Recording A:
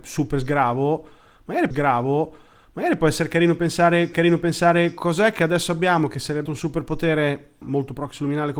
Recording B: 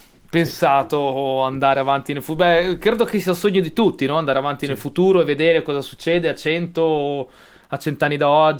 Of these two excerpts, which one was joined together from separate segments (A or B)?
A